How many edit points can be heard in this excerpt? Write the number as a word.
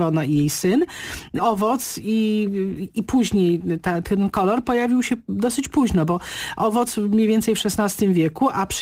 two